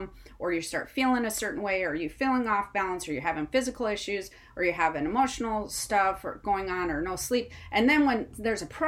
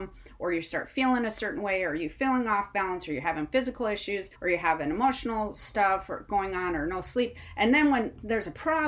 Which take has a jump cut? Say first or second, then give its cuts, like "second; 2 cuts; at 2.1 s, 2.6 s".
second; 1 cut; at 4.3 s